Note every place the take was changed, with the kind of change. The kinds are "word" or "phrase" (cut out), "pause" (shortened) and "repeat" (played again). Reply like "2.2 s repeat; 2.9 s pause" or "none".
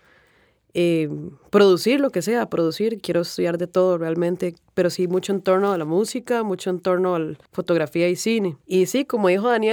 7.4 s pause; 8.6 s pause